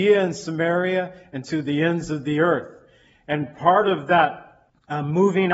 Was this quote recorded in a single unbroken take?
yes; 0 cuts

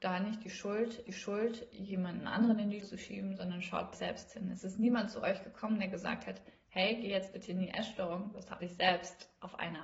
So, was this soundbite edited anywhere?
yes; 4 cuts; at 1.1 s, 2.8 s, 3.9 s, 8.6 s

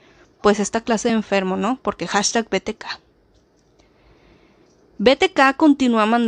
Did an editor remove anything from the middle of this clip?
no; 0 cuts

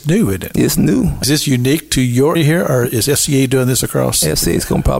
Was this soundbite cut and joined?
yes; 2 cuts; at 1.2 s, 2.4 s

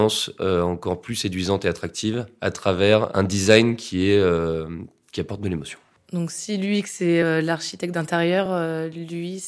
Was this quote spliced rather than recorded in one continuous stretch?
no; 0 cuts

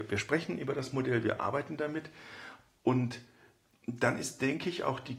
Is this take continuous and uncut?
yes; 0 cuts

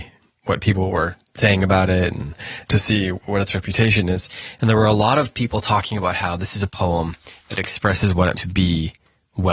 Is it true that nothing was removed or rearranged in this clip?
no; 1 cut; at 8.3 s

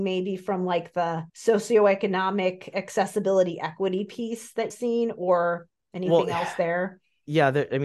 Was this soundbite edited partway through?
yes; 2 cuts; at 1.3 s, 4.7 s

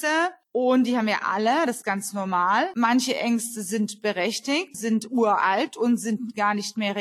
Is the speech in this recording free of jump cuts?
no; 2 cuts; at 1.8 s, 4.7 s

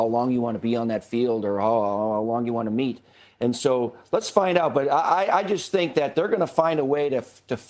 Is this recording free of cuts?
yes; 0 cuts

